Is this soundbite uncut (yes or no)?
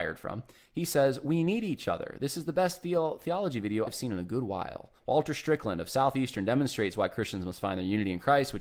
no